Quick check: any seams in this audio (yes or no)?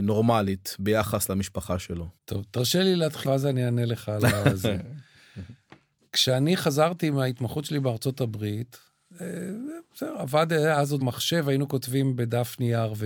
yes